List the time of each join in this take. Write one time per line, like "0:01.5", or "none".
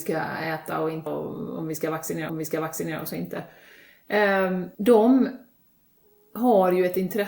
0:01.1
0:02.3
0:04.7